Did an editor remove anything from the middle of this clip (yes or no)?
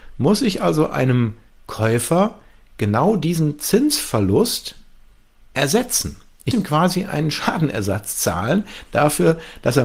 yes